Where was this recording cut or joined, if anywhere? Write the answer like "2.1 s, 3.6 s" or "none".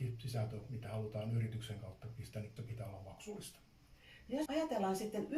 2.6 s, 4.5 s